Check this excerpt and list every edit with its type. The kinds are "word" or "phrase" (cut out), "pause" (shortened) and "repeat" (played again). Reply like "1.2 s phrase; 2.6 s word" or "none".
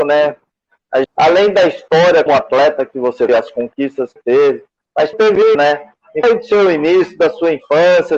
1.0 s word; 2.3 s word; 3.3 s word; 4.2 s word; 5.1 s word; 5.5 s word; 6.2 s word